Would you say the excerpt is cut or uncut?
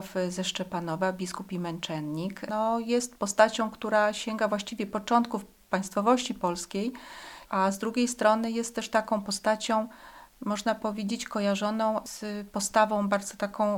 cut